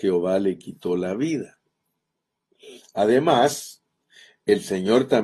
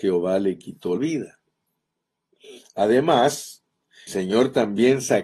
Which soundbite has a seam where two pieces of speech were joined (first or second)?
second